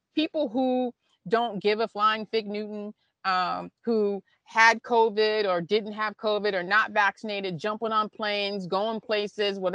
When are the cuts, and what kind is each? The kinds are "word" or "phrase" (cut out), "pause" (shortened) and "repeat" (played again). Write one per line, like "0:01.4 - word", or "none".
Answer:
none